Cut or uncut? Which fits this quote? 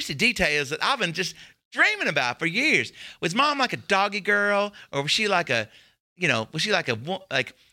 uncut